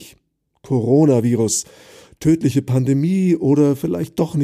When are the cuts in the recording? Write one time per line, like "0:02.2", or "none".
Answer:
none